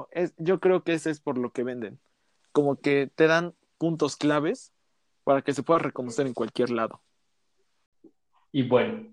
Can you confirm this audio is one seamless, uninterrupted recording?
yes; 0 cuts

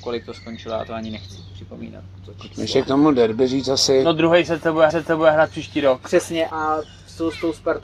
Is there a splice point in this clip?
yes; 2 cuts; at 4.9 s, 6.5 s

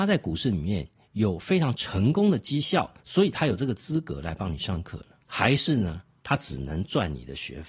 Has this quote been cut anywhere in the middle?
yes; 2 cuts; at 3.0 s, 5.2 s

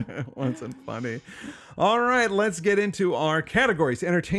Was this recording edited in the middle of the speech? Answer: no; 0 cuts

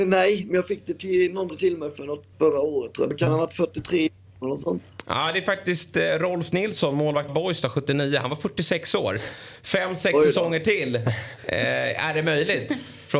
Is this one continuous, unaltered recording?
no; 4 cuts; at 1.5 s, 2.3 s, 3.1 s, 7.3 s

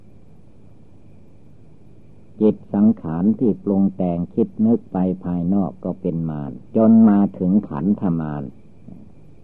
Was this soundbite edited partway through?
yes; 1 cut; at 6.7 s

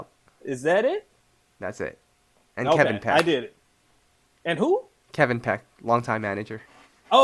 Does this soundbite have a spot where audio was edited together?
no; 0 cuts

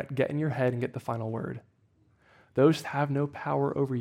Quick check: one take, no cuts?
no; 1 cut; at 2.8 s

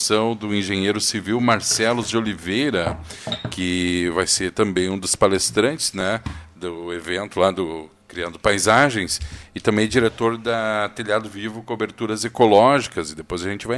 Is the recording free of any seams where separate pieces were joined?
yes; 0 cuts

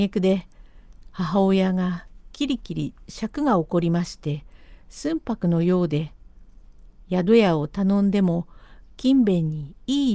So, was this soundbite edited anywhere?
no; 0 cuts

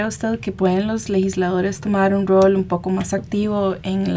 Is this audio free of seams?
yes; 0 cuts

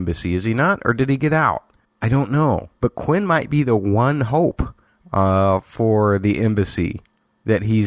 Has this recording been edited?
yes; 3 cuts; at 1.8 s, 2.8 s, 4.9 s

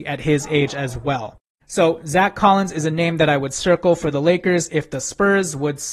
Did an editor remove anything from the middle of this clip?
no; 0 cuts

